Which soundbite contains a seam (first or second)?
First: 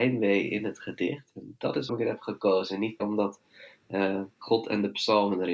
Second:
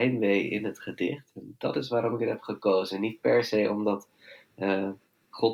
first